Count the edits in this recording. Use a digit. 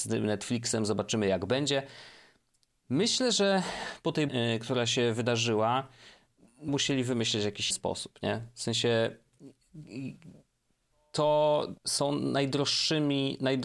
4